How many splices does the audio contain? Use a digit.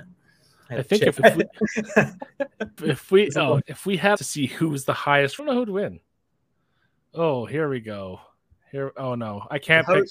5